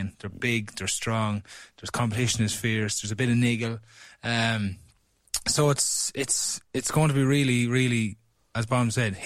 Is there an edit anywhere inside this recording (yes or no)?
no